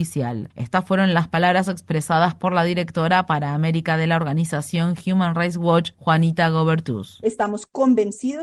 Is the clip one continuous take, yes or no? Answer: yes